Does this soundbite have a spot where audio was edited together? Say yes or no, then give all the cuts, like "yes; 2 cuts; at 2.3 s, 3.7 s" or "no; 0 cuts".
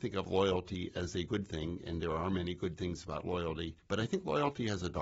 yes; 1 cut; at 3.8 s